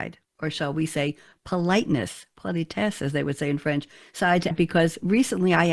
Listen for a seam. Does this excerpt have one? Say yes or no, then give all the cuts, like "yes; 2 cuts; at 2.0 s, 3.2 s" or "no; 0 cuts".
yes; 1 cut; at 4.5 s